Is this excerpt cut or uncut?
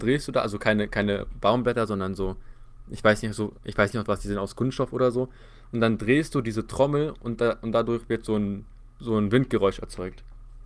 uncut